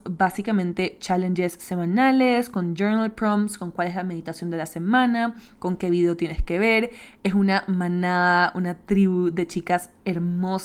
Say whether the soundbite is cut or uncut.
uncut